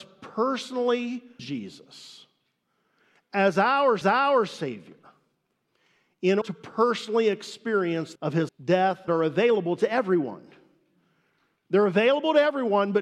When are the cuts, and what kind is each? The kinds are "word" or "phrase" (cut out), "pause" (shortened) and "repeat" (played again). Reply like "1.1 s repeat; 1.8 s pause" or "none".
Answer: 1.4 s word; 4.0 s repeat; 6.4 s word; 8.2 s phrase; 8.5 s word; 9.1 s phrase